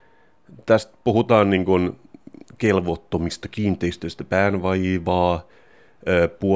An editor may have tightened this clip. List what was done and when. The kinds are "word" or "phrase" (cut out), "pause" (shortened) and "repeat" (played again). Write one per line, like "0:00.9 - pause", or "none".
none